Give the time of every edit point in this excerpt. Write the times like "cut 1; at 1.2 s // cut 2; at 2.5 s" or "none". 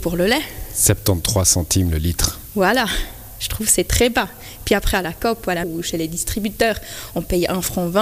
cut 1; at 5.6 s